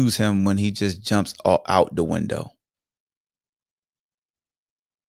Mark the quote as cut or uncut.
uncut